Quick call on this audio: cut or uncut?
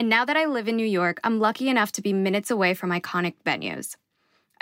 uncut